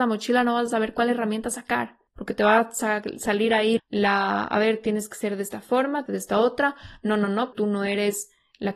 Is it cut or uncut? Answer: cut